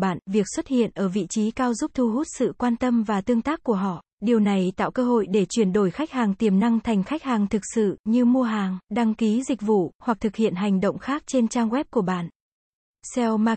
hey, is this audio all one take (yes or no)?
no